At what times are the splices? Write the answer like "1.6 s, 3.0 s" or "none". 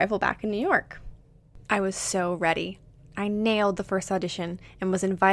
1.6 s, 3.0 s